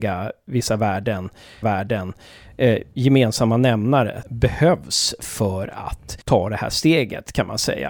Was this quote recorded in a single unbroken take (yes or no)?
no